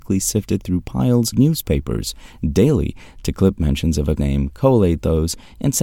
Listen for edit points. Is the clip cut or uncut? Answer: cut